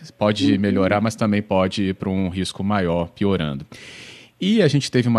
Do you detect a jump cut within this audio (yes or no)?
no